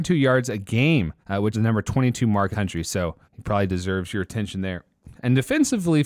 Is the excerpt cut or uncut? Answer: cut